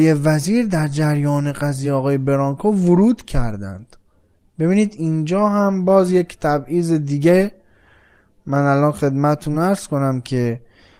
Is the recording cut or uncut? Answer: uncut